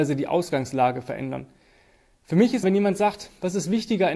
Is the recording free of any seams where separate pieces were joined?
no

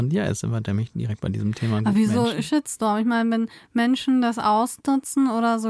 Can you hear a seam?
no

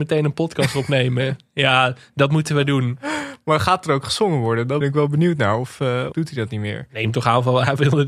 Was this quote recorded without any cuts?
no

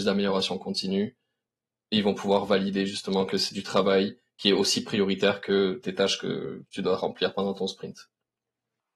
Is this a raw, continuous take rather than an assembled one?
yes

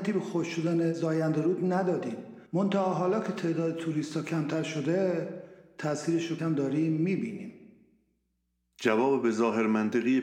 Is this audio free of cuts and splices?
no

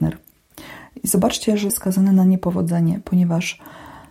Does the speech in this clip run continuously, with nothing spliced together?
no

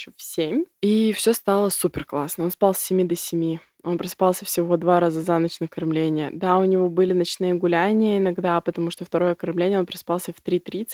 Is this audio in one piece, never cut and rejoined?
yes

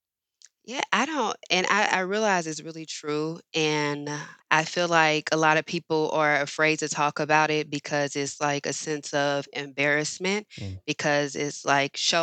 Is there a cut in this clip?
yes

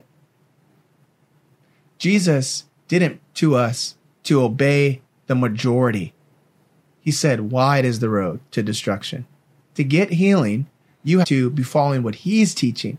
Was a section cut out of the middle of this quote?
yes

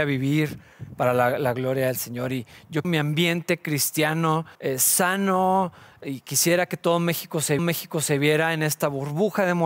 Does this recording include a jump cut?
yes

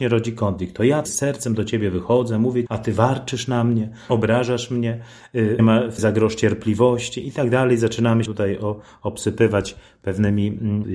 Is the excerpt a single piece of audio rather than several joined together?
no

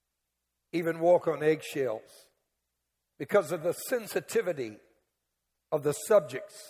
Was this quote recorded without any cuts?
yes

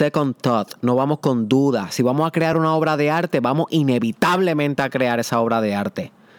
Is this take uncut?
yes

